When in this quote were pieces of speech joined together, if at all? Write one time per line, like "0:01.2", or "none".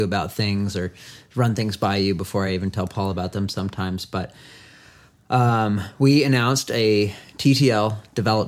none